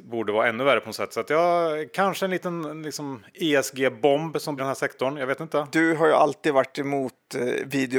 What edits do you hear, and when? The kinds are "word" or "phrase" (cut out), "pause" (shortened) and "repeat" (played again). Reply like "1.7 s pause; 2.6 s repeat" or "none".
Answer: 4.6 s phrase